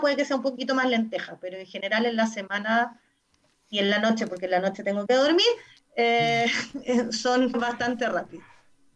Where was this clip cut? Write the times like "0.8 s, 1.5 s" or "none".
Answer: 7.5 s